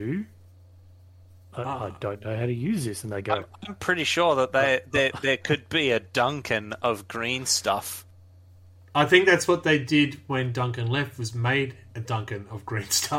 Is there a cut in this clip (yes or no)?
no